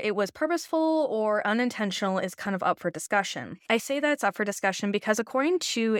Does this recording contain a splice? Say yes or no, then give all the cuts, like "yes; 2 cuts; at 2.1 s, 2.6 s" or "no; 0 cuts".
no; 0 cuts